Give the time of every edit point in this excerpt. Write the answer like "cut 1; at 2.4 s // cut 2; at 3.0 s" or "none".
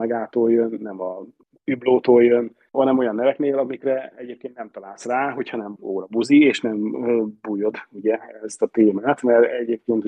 cut 1; at 2.7 s // cut 2; at 5.8 s